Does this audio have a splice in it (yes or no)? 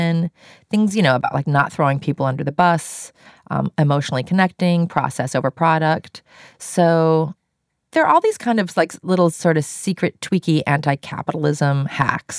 no